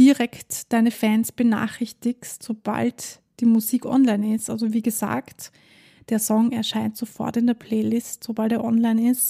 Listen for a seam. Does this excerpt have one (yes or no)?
no